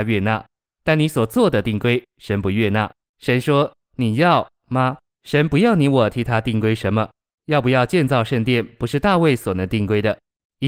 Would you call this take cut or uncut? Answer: cut